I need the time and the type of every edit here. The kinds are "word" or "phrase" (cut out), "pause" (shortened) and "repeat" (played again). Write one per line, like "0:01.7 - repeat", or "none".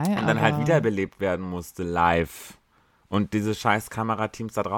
none